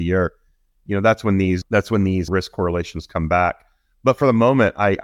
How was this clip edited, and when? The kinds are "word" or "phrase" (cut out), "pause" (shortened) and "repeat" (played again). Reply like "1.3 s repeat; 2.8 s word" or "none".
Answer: 1.6 s word; 2.3 s word